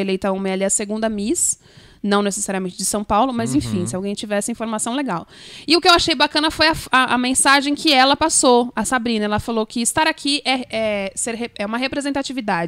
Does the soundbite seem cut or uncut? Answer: uncut